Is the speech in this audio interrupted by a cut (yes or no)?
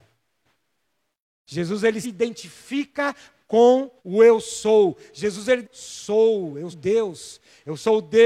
yes